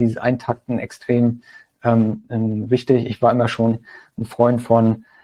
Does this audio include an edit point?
no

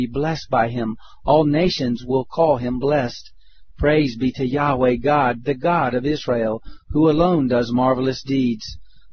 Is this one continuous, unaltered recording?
yes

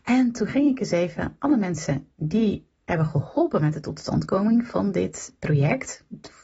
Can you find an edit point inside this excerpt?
no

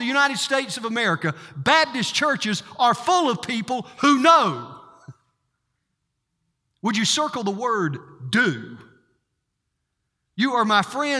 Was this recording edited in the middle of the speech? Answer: no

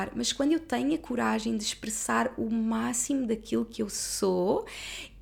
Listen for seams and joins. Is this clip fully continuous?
yes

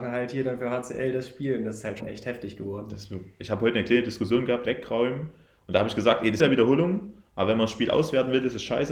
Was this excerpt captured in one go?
no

